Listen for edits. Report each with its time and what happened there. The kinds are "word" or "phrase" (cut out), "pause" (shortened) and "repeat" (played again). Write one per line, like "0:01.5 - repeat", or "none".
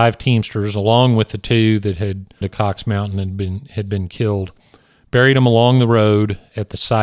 0:02.4 - phrase